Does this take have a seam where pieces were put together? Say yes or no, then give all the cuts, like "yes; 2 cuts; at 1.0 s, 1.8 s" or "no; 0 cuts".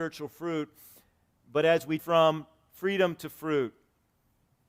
yes; 1 cut; at 2.0 s